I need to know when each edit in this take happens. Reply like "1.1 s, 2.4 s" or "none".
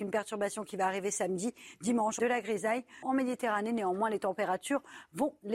2.2 s, 3.0 s